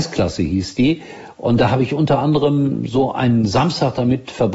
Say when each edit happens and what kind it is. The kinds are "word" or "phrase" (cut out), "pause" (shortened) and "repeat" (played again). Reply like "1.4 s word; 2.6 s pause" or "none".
none